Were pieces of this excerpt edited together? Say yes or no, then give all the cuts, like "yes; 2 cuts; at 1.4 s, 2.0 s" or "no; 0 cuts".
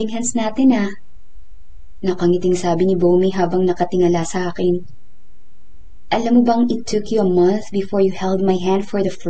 no; 0 cuts